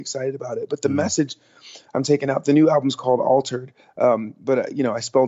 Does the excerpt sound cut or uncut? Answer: uncut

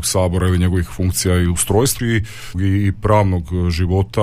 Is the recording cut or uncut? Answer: cut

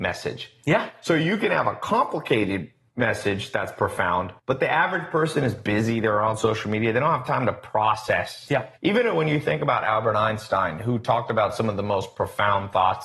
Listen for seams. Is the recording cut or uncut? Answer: cut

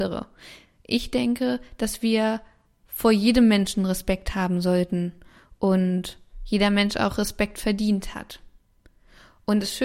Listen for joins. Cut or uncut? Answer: uncut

